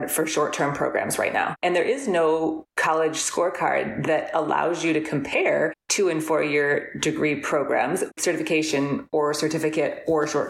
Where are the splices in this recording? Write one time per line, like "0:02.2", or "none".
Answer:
0:01.6
0:02.7
0:08.2

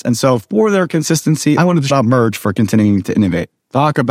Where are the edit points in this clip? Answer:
0:01.6
0:01.9

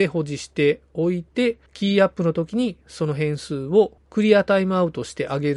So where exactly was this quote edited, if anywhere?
0:01.7

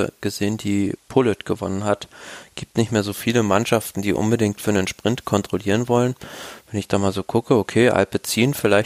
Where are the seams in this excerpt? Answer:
0:01.0

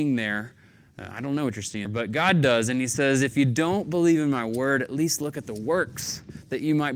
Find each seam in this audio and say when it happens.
0:01.8

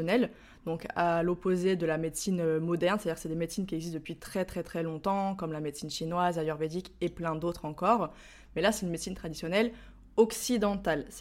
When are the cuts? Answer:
none

